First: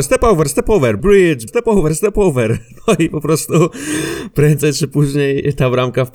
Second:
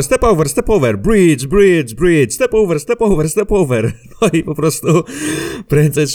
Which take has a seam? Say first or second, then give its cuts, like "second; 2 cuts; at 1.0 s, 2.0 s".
first; 2 cuts; at 1.0 s, 1.5 s